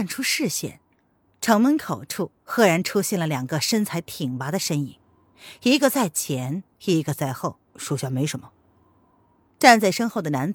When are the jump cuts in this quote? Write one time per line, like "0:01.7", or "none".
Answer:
0:06.7
0:07.7